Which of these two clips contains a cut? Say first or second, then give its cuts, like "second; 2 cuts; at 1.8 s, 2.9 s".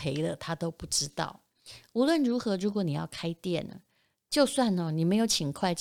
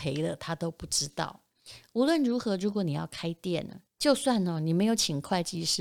second; 1 cut; at 3.8 s